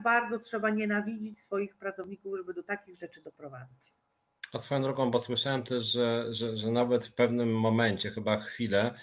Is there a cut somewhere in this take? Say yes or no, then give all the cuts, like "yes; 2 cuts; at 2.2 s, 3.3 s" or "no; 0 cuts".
no; 0 cuts